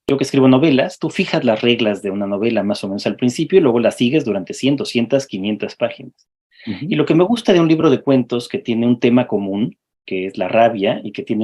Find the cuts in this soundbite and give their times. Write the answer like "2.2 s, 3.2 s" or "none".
none